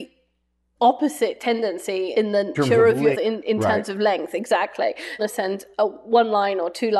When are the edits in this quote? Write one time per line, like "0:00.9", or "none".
0:02.1
0:02.5
0:03.1
0:05.2